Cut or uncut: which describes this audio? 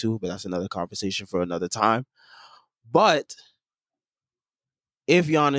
uncut